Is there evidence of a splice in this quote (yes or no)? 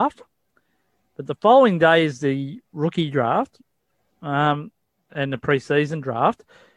yes